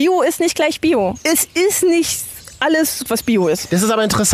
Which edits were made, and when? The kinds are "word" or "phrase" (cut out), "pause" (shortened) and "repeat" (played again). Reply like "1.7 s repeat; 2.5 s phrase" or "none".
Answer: 3.1 s word